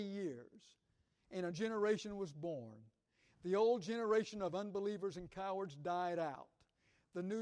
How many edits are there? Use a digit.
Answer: 1